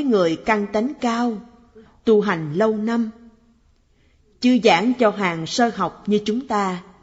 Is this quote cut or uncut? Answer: uncut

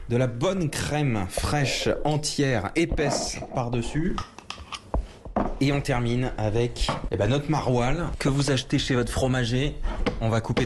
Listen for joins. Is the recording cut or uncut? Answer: uncut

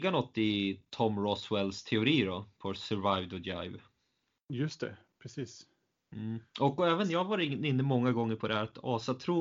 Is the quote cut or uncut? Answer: uncut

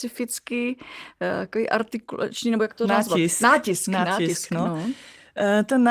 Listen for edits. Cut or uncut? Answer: uncut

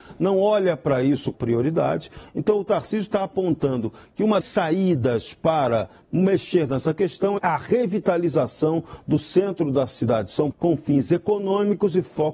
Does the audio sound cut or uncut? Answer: cut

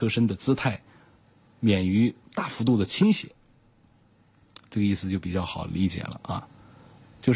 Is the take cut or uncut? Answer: uncut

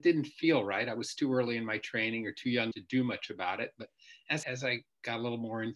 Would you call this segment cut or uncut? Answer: cut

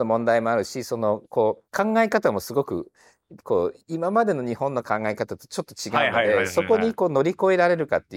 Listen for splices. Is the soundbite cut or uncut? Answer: cut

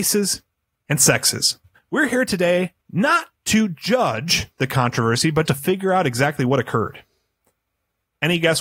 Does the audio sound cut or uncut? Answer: cut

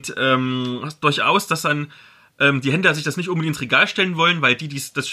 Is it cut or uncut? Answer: uncut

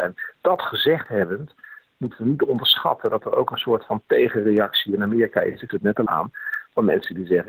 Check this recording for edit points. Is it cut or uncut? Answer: cut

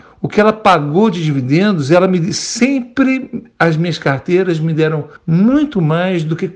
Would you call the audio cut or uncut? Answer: cut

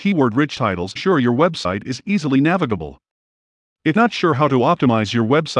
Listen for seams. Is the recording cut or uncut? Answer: cut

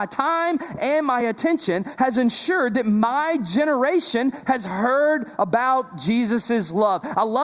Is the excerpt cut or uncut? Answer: uncut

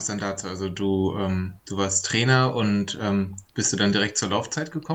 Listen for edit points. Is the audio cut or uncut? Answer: cut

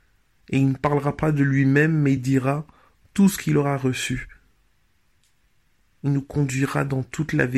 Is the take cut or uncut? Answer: uncut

